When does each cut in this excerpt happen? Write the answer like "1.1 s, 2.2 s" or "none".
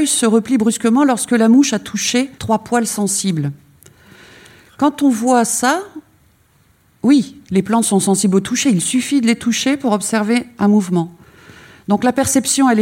2.4 s